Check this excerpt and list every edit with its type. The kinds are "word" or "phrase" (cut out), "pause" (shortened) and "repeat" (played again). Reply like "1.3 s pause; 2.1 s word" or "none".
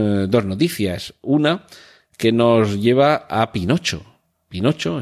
none